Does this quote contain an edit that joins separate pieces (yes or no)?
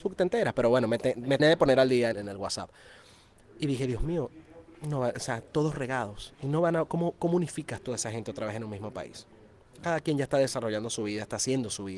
yes